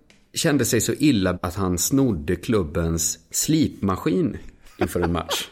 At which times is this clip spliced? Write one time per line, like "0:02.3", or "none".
0:01.3

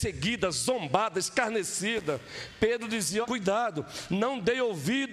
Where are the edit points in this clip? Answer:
0:03.2

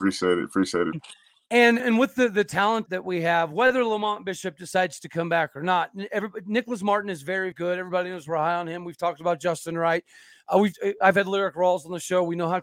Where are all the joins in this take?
0:00.9
0:01.8
0:02.9
0:07.5

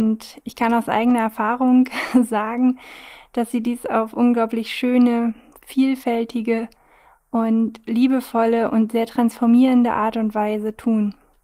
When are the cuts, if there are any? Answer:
none

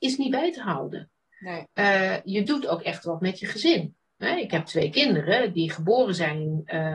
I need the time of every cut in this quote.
none

